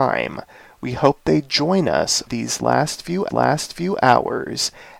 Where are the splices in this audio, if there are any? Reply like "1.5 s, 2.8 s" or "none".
2.3 s, 3.3 s